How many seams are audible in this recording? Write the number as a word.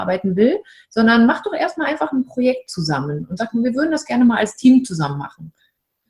zero